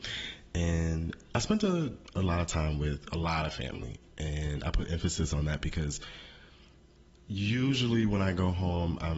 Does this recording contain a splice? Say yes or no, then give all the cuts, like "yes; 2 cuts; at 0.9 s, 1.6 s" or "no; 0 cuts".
no; 0 cuts